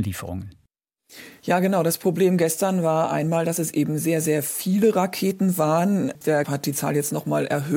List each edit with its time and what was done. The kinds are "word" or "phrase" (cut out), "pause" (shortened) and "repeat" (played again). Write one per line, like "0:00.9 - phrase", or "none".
0:06.4 - word